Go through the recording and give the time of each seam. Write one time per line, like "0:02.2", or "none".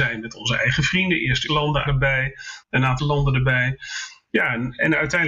0:01.5
0:01.9
0:03.0